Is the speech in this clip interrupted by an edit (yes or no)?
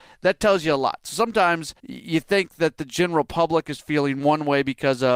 yes